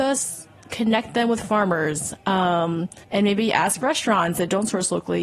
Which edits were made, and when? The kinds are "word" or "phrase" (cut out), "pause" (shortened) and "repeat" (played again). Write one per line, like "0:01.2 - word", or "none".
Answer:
0:03.0 - pause